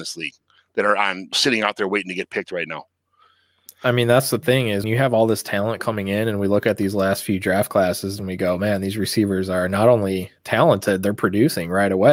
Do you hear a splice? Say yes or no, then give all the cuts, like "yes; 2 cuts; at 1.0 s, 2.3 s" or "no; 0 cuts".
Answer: yes; 3 cuts; at 1.3 s, 4.8 s, 10.4 s